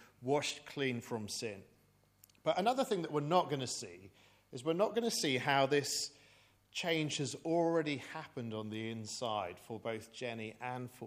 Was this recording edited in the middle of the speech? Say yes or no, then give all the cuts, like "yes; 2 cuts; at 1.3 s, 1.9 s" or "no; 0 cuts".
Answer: no; 0 cuts